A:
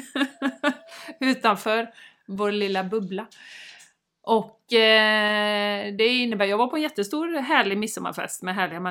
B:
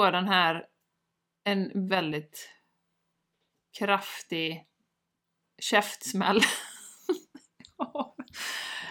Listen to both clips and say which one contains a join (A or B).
B